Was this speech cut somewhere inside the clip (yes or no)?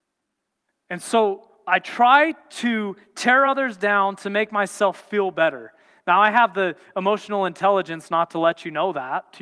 no